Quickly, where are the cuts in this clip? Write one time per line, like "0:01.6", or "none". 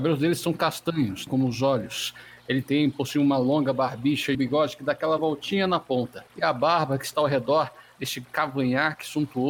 0:01.3
0:04.3
0:06.3